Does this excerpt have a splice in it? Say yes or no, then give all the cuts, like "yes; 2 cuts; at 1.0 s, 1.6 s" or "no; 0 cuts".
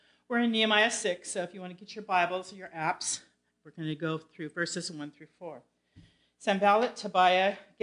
no; 0 cuts